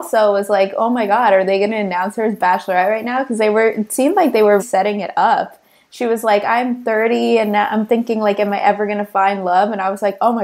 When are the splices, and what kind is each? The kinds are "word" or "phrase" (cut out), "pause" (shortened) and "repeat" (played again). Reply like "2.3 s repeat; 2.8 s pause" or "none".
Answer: 4.6 s word